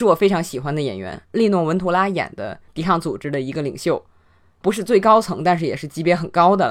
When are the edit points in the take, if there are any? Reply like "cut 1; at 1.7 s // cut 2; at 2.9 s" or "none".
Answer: cut 1; at 1.2 s